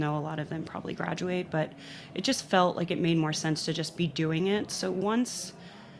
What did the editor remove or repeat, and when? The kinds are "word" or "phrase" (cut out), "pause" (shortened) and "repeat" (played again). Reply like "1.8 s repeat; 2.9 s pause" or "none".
none